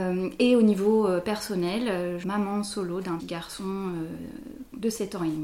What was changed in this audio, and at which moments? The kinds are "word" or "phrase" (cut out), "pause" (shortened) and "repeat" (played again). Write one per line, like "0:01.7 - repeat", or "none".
0:02.2 - word
0:03.2 - word